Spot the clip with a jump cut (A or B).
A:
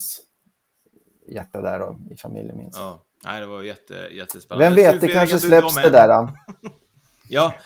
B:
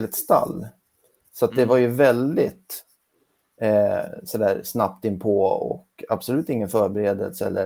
A